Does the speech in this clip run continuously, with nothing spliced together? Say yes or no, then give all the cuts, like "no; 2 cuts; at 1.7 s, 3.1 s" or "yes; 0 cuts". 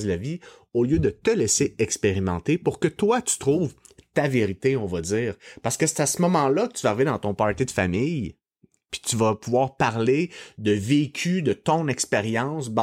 yes; 0 cuts